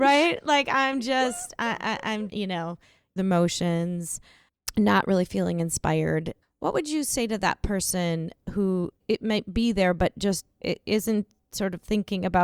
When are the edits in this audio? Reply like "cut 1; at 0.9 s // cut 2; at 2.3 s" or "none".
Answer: cut 1; at 2.3 s // cut 2; at 3.2 s // cut 3; at 9.0 s